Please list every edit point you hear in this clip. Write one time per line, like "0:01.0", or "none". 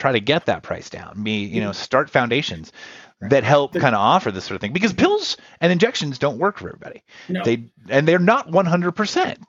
none